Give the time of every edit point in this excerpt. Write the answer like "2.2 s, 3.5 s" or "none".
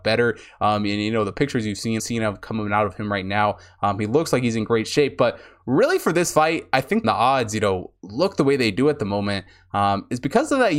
2.0 s, 7.0 s